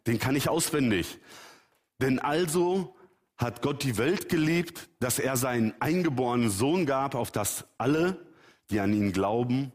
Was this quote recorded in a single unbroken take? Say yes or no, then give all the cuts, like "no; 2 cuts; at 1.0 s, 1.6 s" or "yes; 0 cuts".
yes; 0 cuts